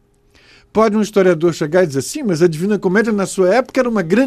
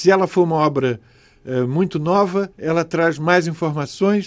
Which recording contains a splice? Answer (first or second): second